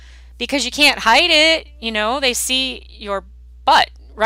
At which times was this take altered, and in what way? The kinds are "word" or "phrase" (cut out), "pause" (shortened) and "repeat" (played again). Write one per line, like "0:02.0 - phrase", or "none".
none